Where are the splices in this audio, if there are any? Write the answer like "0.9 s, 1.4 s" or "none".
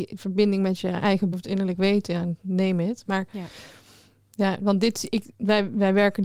1.3 s